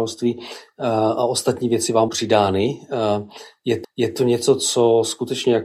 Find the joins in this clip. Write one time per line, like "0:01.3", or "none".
0:02.1
0:03.8